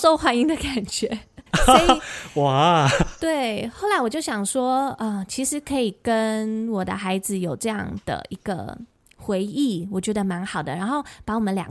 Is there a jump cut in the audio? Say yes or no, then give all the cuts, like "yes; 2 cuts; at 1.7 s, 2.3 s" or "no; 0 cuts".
yes; 1 cut; at 1.5 s